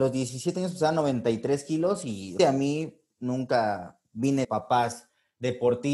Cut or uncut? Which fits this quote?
cut